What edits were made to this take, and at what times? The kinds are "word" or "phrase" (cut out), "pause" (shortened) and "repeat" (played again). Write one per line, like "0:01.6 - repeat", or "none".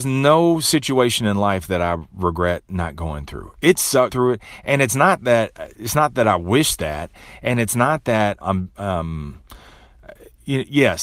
0:04.1 - word
0:08.4 - word